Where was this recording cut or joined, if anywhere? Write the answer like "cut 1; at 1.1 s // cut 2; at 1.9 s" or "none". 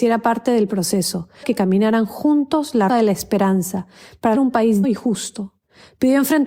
cut 1; at 1.4 s // cut 2; at 2.9 s // cut 3; at 4.3 s // cut 4; at 4.8 s